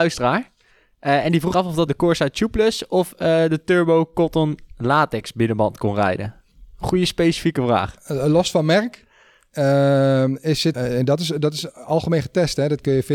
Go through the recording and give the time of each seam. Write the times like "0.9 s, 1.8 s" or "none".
1.5 s, 1.9 s, 10.7 s